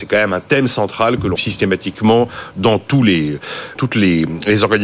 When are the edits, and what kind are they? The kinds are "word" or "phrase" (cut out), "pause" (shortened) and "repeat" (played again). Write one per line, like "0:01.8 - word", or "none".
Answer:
0:01.4 - word
0:03.8 - word